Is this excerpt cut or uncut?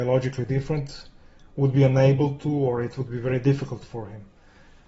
uncut